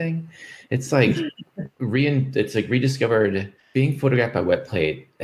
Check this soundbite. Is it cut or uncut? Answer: cut